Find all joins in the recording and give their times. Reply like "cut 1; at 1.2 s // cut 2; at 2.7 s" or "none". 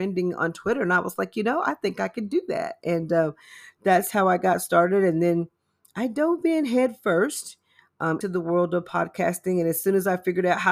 cut 1; at 8.2 s